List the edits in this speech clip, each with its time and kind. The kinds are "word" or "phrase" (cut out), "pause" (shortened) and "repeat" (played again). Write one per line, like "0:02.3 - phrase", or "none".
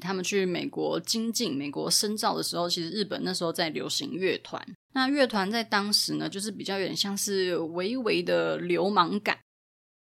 0:04.8 - pause